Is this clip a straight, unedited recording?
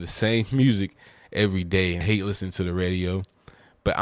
no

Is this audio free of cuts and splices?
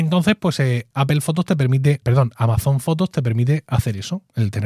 no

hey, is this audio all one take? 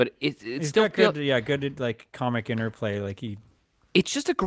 yes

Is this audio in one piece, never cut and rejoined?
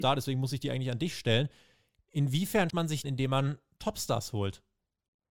no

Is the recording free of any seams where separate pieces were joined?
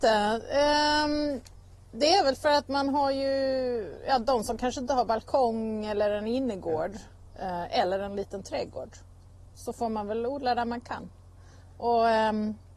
yes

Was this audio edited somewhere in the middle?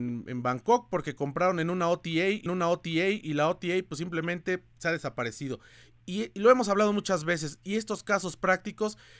yes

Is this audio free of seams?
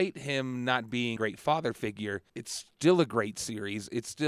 no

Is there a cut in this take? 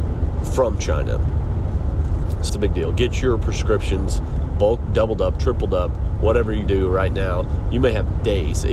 yes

